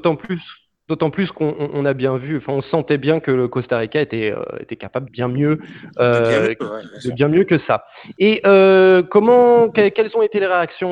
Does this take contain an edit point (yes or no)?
yes